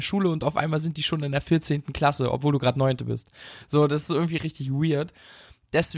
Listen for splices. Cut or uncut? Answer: cut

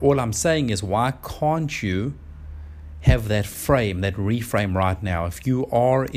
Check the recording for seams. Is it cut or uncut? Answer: uncut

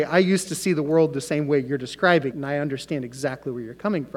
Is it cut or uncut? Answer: cut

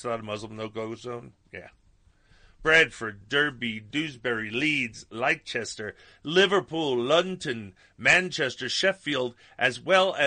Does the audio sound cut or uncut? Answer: uncut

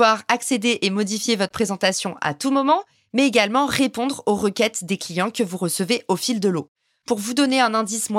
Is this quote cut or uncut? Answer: uncut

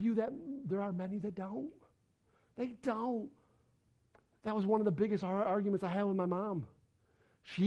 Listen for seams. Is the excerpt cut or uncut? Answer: uncut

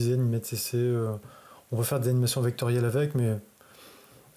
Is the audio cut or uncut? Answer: uncut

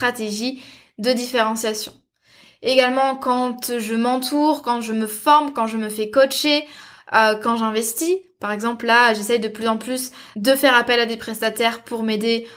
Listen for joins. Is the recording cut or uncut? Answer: cut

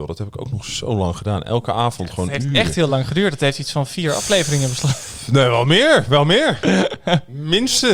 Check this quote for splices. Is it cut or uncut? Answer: uncut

